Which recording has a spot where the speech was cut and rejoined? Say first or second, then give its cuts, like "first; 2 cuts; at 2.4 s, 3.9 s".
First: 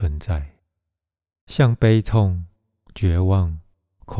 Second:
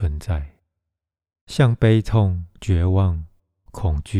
second; 1 cut; at 2.6 s